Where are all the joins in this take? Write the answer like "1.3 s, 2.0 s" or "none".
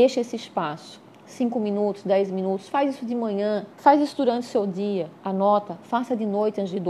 3.7 s